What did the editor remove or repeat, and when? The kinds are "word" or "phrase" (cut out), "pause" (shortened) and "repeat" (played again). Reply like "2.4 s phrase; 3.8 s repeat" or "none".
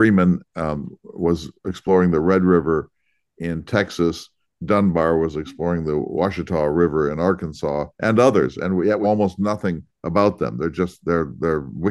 7.9 s pause; 9.0 s word